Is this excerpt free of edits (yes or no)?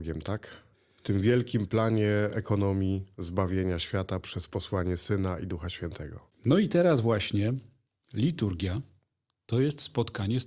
yes